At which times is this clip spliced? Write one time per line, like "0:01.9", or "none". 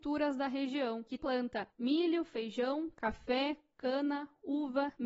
0:01.2